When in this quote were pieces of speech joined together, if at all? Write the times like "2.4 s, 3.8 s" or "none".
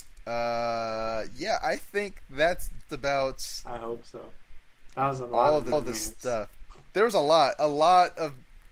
2.9 s, 5.7 s